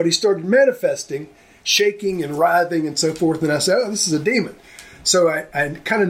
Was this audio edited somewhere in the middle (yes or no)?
no